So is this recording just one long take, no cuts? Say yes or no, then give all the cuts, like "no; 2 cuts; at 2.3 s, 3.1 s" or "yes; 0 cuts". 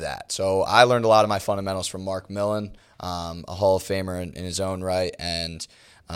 yes; 0 cuts